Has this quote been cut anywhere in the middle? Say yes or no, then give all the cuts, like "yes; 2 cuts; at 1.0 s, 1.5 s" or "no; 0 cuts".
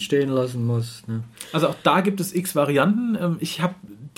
no; 0 cuts